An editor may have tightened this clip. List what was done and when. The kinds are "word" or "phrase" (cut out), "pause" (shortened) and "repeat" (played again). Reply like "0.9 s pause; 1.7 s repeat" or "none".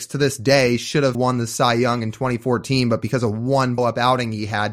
1.1 s word; 3.8 s word